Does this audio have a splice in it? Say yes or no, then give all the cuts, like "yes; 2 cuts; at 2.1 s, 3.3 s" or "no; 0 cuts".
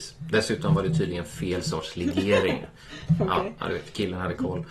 no; 0 cuts